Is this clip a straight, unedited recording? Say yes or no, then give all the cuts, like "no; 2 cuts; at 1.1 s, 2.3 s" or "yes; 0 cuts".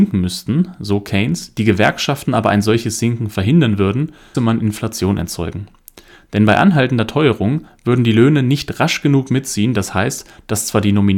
no; 1 cut; at 4.3 s